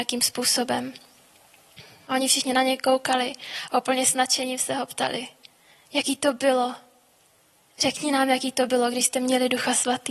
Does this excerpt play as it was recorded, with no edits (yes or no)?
yes